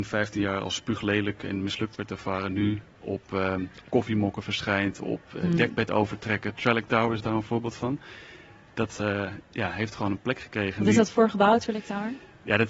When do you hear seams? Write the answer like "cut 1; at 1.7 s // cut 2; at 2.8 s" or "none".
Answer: none